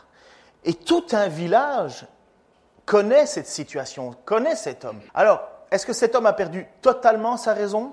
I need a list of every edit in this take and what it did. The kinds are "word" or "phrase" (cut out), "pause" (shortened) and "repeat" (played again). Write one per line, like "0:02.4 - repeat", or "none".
0:05.1 - pause

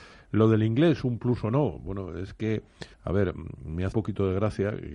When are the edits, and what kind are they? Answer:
0:02.9 - pause
0:03.9 - word

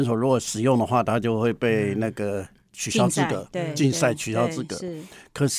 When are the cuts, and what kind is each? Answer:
none

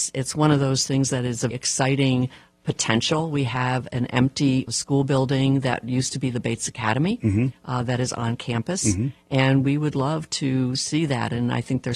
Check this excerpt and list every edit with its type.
0:01.5 - word
0:04.7 - word

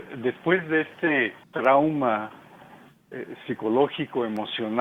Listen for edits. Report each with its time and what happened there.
0:01.4 - pause

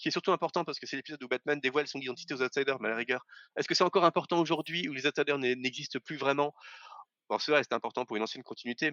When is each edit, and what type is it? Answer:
none

